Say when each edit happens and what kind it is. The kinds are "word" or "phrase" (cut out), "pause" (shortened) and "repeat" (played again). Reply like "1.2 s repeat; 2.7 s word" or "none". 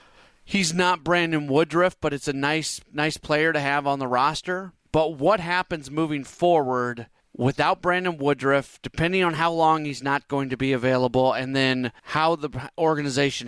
4.8 s pause; 7.2 s pause; 12.0 s pause